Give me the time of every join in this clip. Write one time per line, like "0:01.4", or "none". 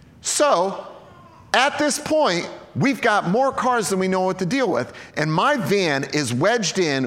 none